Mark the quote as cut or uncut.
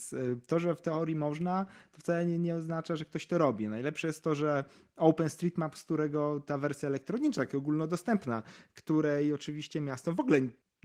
uncut